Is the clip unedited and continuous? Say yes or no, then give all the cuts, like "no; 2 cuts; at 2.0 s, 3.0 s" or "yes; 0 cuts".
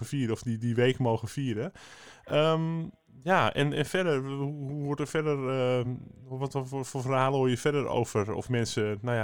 yes; 0 cuts